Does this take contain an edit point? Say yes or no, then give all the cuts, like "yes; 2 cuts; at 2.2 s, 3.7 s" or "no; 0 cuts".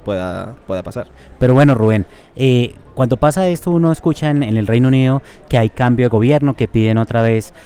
no; 0 cuts